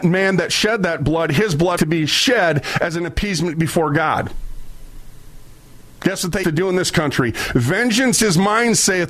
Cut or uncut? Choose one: cut